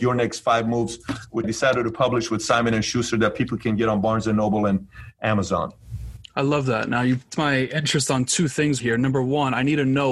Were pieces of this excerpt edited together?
yes; 3 cuts; at 1.4 s, 7.3 s, 8.8 s

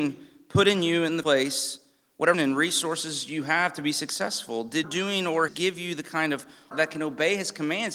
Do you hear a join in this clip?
yes; 5 cuts; at 1.2 s, 2.3 s, 4.8 s, 5.5 s, 6.7 s

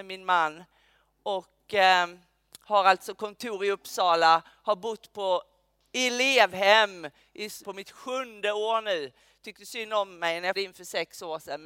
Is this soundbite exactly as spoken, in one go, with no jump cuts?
no; 2 cuts; at 7.6 s, 10.5 s

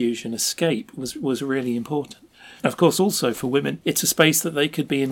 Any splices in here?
no; 0 cuts

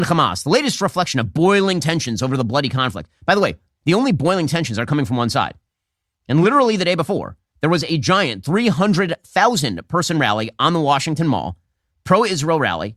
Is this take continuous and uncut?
yes; 0 cuts

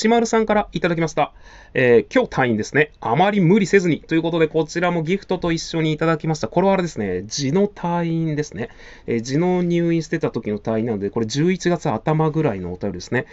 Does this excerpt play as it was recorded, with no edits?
yes; 0 cuts

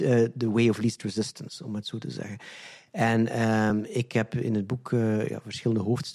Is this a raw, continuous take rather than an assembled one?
yes; 0 cuts

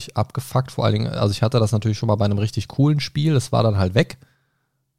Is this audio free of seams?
yes; 0 cuts

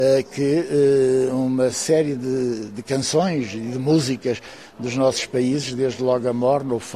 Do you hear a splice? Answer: no; 0 cuts

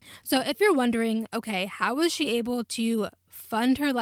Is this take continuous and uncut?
yes; 0 cuts

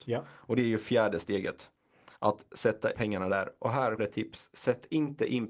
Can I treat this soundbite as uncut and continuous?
no; 3 cuts; at 2.1 s, 2.9 s, 4.0 s

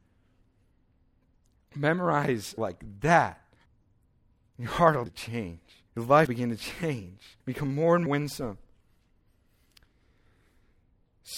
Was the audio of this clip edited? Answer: yes; 7 cuts; at 2.6 s, 3.7 s, 5.1 s, 5.9 s, 6.3 s, 7.4 s, 8.1 s

